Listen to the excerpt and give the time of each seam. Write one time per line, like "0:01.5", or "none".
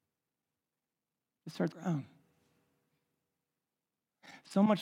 0:01.7